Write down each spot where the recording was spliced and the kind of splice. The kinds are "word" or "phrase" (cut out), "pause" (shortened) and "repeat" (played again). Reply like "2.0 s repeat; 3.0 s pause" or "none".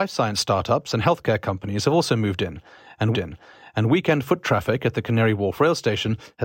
3.1 s repeat